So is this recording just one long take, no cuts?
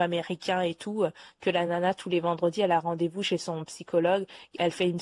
yes; 0 cuts

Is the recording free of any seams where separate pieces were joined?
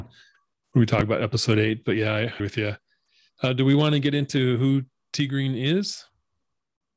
no; 1 cut; at 2.4 s

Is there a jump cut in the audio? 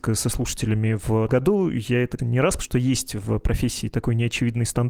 yes; 3 cuts; at 1.3 s, 2.2 s, 2.6 s

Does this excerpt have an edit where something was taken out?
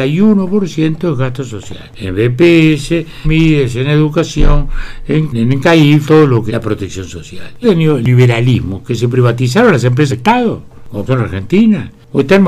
yes; 7 cuts; at 3.2 s, 5.3 s, 6.0 s, 6.5 s, 7.6 s, 10.1 s, 11.1 s

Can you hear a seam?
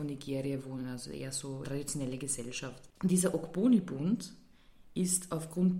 yes; 1 cut; at 1.6 s

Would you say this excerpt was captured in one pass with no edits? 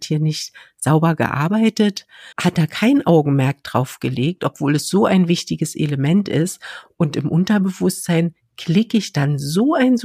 no; 1 cut; at 2.3 s

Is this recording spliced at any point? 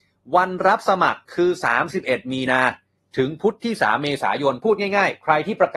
yes; 1 cut; at 1.2 s

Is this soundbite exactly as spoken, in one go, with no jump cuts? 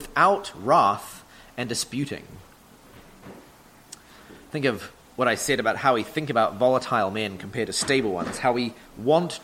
yes; 0 cuts

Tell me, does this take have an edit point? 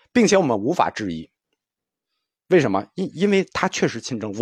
no; 0 cuts

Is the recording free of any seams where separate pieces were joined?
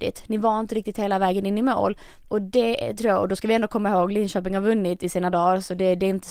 yes; 0 cuts

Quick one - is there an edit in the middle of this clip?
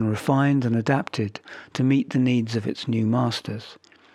no; 0 cuts

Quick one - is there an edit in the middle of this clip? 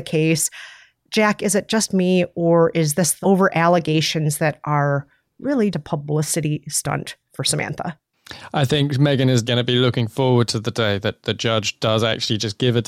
yes; 3 cuts; at 3.2 s, 5.7 s, 9.5 s

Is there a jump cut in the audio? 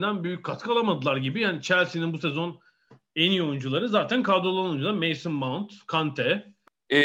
no; 0 cuts

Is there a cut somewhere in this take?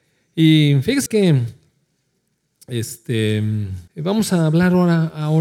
yes; 2 cuts; at 1.1 s, 3.9 s

